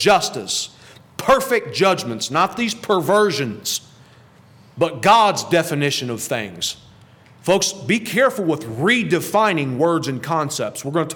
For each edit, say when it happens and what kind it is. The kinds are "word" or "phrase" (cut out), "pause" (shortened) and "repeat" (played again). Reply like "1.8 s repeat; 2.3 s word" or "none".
none